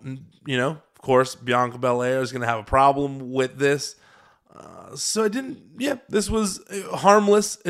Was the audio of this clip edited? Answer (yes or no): no